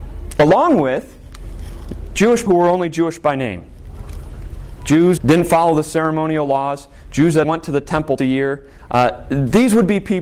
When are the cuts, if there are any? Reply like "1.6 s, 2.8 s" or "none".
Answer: 2.5 s, 5.2 s, 7.4 s, 8.2 s